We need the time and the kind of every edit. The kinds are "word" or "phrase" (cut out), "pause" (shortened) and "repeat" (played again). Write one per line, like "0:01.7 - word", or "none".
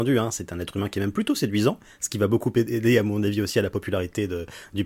none

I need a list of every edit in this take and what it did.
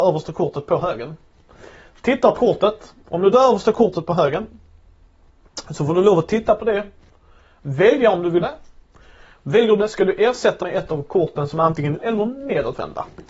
0:02.4 - word
0:03.3 - word
0:08.4 - word
0:09.8 - word
0:10.6 - word
0:12.0 - word

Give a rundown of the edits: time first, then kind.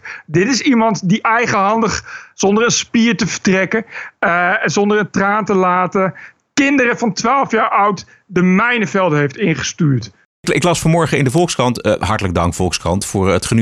none

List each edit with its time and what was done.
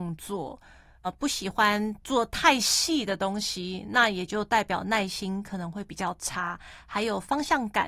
0:01.0 - word

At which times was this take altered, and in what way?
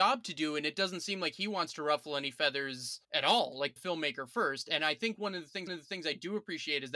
0:03.0 - pause
0:03.8 - phrase
0:05.7 - repeat

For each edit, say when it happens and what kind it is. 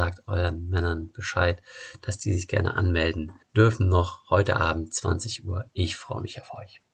0:03.4 - pause

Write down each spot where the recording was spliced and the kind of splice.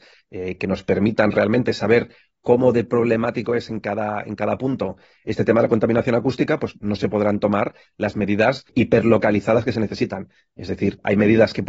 none

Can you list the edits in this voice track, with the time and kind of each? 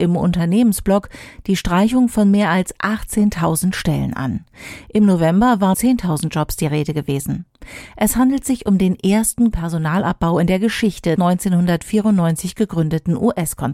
0:05.7 - phrase
0:09.5 - word
0:11.2 - word

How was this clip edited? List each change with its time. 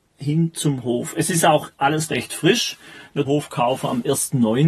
0:02.1 - word
0:03.3 - phrase

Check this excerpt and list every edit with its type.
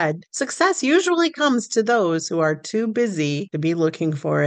none

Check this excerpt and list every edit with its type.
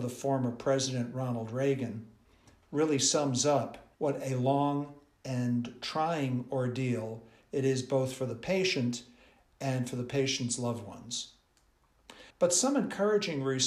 0:03.9 - pause
0:12.3 - pause

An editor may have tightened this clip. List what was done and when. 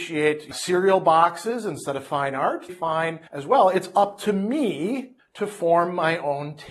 0:02.7 - phrase

